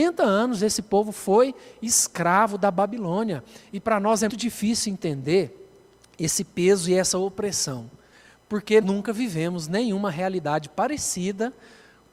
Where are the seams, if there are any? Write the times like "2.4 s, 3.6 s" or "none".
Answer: 4.3 s, 8.8 s

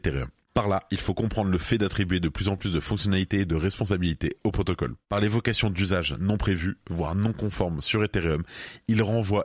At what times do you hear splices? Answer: none

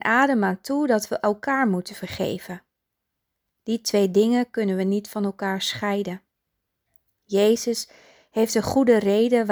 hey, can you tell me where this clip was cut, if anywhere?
none

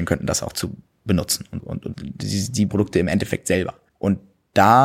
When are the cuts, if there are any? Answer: 1.6 s, 1.9 s, 2.7 s

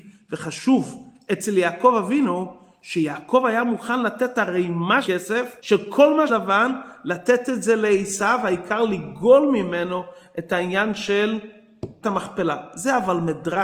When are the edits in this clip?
5.0 s, 5.6 s, 6.3 s, 12.0 s

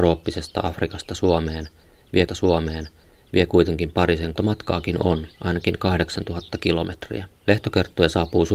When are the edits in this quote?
2.3 s, 4.4 s, 5.3 s, 7.3 s

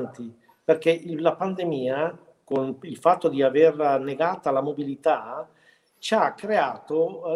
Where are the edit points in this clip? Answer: none

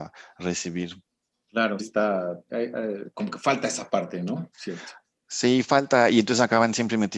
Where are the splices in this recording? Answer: 1.8 s, 2.5 s, 3.1 s

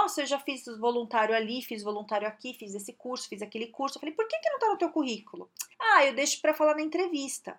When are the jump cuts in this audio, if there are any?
5.7 s

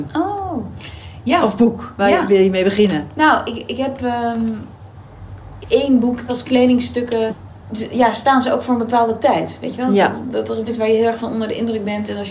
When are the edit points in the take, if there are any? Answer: 5.6 s, 6.3 s, 10.7 s

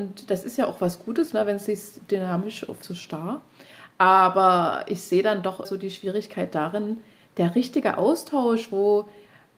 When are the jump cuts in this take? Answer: 2.8 s, 5.6 s

